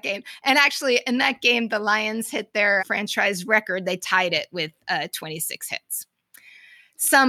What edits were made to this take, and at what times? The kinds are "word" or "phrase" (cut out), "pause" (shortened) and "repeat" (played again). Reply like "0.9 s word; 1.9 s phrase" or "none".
2.8 s word